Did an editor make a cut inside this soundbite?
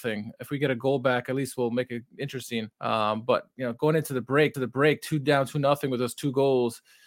yes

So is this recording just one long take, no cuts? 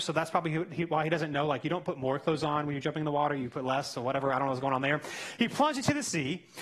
yes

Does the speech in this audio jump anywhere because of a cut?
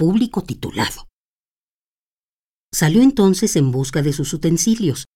no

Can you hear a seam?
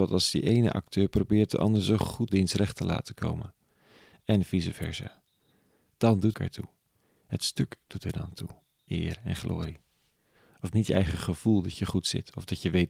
yes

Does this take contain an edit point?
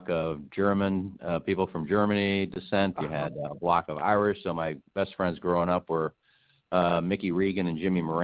no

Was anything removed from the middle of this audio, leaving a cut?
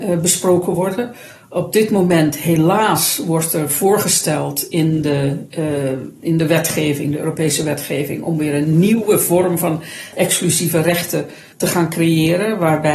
no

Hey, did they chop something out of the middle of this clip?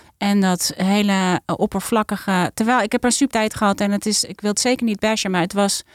yes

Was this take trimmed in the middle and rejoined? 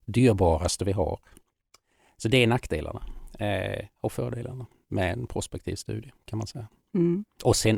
no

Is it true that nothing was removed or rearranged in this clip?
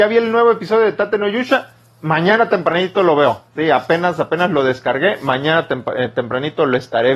yes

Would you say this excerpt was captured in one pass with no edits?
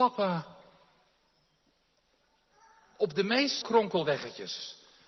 no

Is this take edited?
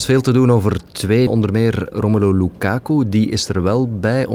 yes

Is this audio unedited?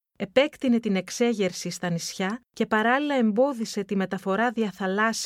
no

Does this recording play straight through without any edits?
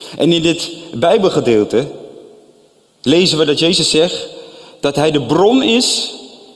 yes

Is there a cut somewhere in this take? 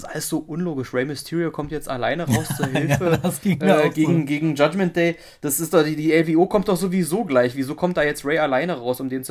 no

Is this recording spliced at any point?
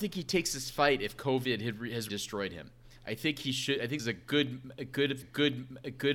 yes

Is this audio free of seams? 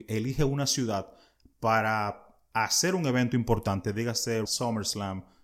no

